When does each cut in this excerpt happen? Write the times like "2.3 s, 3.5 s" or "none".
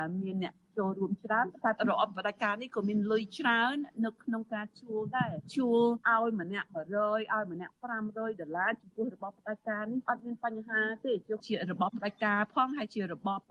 none